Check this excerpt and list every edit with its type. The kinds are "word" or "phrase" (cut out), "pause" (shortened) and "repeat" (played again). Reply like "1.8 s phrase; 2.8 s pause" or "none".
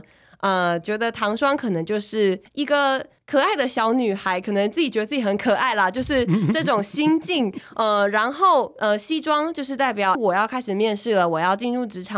10.1 s word